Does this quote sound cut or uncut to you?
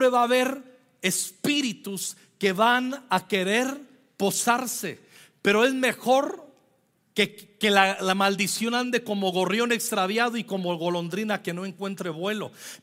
uncut